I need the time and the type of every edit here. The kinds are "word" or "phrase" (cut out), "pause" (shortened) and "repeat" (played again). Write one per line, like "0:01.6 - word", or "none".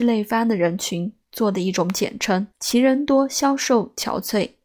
0:02.5 - pause